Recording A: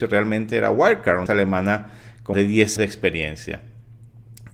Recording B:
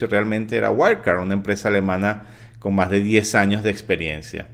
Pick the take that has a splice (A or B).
A